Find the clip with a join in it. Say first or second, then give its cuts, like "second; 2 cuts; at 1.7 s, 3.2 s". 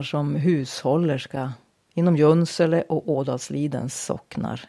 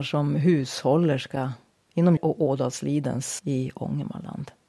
second; 2 cuts; at 2.2 s, 3.4 s